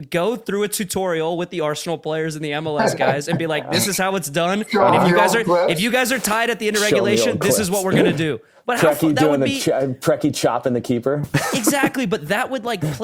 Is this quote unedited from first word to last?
yes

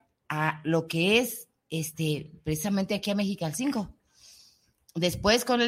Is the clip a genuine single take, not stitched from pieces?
yes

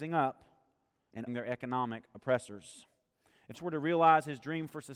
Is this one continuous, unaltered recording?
no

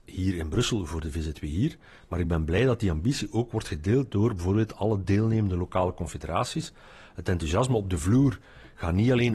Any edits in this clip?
no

